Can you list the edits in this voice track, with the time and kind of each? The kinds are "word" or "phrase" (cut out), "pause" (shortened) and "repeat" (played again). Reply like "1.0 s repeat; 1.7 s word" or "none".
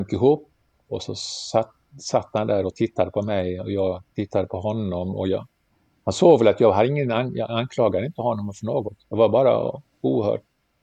5.7 s pause; 9.0 s pause